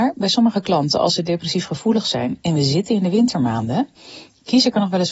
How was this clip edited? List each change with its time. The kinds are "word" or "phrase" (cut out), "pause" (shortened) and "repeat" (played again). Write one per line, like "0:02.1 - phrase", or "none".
none